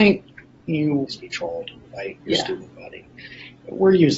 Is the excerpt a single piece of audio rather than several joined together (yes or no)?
no